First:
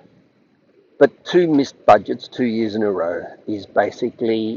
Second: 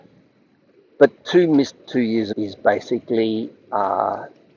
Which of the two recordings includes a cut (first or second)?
second